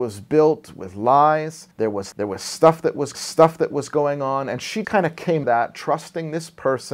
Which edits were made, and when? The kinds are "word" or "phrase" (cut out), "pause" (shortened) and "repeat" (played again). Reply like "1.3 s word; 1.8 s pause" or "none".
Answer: 1.7 s pause; 2.1 s word; 3.1 s repeat; 4.8 s word; 5.4 s word